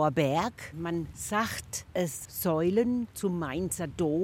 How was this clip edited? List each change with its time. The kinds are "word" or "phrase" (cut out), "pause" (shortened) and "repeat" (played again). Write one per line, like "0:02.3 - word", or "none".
0:02.3 - word